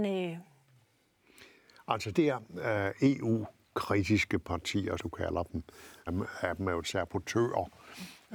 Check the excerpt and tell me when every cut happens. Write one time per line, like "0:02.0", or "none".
0:02.1
0:05.0
0:06.1
0:06.8